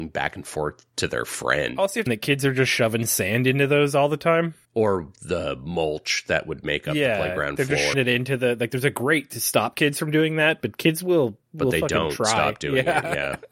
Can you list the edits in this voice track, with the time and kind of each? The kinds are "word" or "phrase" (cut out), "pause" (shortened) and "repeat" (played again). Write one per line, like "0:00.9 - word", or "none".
0:02.1 - phrase
0:04.6 - pause
0:07.9 - word